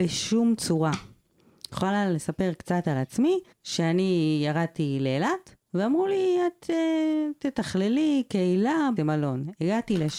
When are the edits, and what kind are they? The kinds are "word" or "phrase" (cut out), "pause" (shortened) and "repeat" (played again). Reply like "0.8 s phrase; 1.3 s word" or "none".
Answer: 3.5 s pause; 5.6 s pause; 9.0 s word